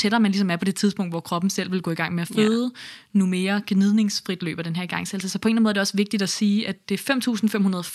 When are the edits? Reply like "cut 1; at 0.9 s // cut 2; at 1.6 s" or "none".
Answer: none